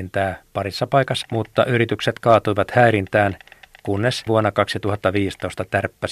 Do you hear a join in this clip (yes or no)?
yes